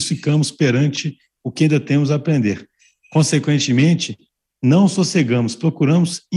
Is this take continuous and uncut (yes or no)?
yes